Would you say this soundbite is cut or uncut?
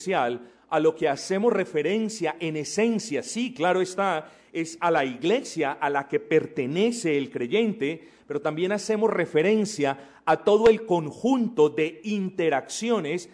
uncut